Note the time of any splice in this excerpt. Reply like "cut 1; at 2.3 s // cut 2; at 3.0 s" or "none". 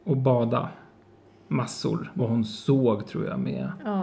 cut 1; at 2.2 s